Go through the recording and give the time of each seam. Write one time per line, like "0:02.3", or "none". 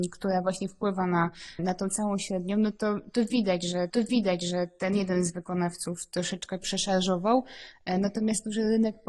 0:01.6
0:03.9